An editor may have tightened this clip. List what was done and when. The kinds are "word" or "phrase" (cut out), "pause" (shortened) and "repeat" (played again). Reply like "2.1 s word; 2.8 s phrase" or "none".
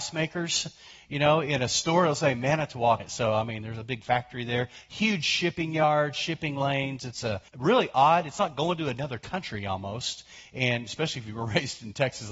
3.0 s word; 7.5 s pause